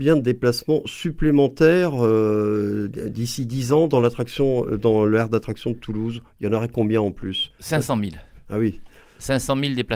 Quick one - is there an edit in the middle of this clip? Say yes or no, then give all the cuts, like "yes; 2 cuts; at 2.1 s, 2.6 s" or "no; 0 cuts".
no; 0 cuts